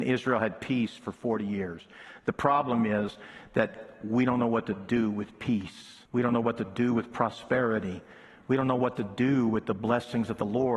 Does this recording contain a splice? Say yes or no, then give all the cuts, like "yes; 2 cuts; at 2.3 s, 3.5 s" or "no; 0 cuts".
yes; 1 cut; at 6.1 s